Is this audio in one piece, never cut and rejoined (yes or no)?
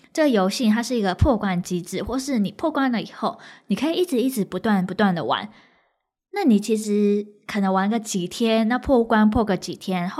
yes